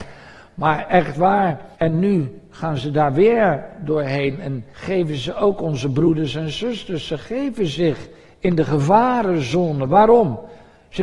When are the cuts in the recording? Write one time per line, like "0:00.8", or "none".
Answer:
0:01.7
0:04.7